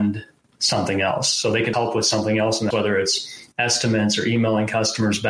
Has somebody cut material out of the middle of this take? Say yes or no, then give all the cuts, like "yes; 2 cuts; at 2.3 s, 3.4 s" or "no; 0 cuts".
yes; 3 cuts; at 1.7 s, 2.7 s, 3.5 s